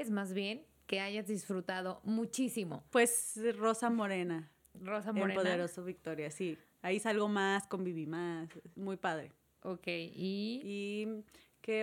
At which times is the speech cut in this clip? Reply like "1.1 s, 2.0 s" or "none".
2.9 s, 8.7 s